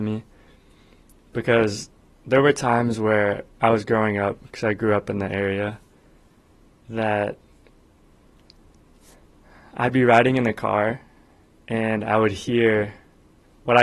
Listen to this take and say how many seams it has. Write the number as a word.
zero